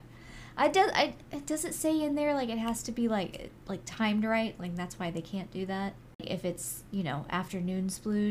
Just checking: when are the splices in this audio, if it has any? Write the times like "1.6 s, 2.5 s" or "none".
none